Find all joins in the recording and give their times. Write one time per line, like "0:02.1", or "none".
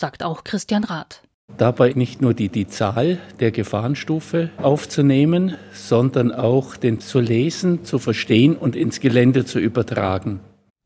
0:01.9
0:02.5
0:07.0